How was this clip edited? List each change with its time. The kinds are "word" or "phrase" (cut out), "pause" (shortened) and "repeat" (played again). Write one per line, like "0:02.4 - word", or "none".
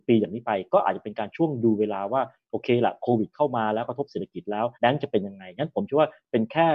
0:04.7 - pause